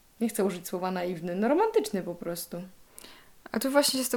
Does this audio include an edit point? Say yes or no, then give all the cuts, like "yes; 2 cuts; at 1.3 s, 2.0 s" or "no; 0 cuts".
no; 0 cuts